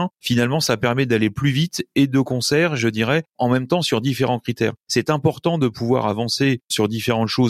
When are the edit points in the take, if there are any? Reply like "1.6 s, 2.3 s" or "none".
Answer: none